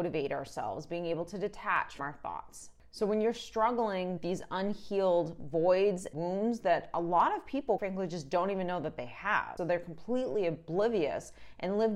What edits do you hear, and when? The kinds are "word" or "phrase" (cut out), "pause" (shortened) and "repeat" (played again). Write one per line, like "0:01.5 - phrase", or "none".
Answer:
0:02.0 - word
0:04.2 - word
0:06.1 - word
0:07.8 - word
0:09.6 - word